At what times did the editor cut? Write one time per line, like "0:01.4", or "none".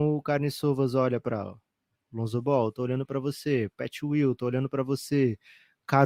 none